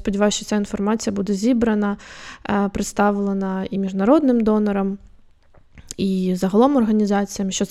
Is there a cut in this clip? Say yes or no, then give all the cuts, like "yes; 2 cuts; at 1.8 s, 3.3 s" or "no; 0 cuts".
no; 0 cuts